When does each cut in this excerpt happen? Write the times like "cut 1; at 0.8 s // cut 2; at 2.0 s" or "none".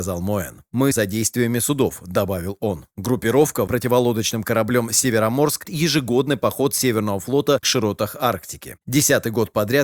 cut 1; at 0.9 s // cut 2; at 3.7 s // cut 3; at 5.6 s // cut 4; at 7.6 s